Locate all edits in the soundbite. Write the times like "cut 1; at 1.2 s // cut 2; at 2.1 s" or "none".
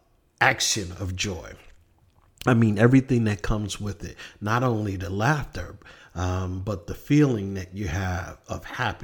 none